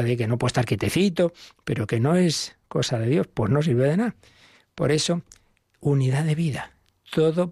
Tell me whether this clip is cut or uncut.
uncut